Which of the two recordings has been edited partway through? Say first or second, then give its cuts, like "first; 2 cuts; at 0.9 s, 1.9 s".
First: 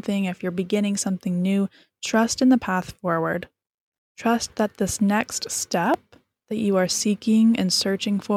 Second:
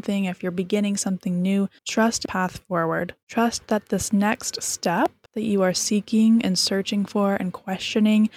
second; 4 cuts; at 1.8 s, 2.2 s, 3.2 s, 5.3 s